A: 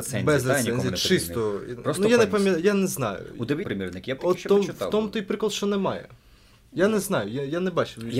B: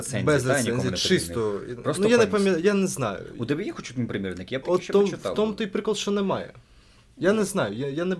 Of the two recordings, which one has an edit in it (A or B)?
A